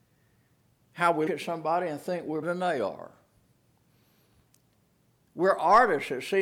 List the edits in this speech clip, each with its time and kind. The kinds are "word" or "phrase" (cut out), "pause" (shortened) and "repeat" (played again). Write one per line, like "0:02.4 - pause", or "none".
0:01.3 - word
0:02.4 - word

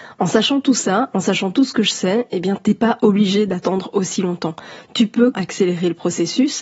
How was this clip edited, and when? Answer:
0:05.3 - word

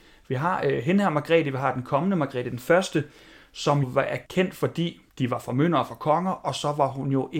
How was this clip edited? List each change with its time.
0:03.8 - word
0:04.2 - pause
0:05.1 - pause

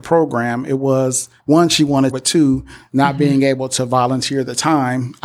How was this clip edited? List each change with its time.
0:01.4 - pause
0:02.1 - phrase

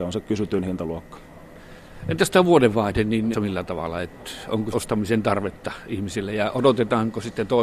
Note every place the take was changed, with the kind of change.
0:03.3 - phrase
0:04.7 - phrase

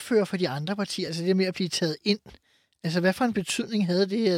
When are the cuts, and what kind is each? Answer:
none

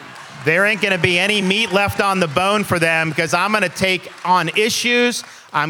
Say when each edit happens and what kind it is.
none

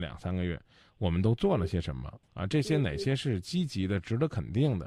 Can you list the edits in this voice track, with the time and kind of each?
0:02.2 - pause

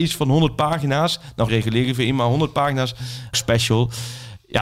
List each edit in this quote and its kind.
0:01.5 - phrase
0:03.3 - word

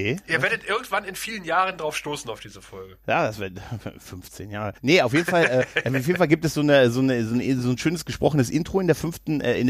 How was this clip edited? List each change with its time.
0:04.8 - pause

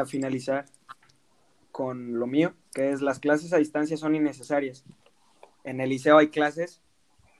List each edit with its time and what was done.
0:02.6 - pause

